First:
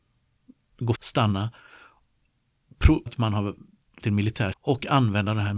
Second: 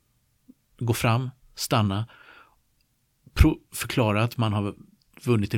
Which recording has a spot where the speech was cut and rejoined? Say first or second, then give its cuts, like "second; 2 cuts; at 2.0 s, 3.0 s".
first; 4 cuts; at 0.9 s, 3.1 s, 4.0 s, 4.5 s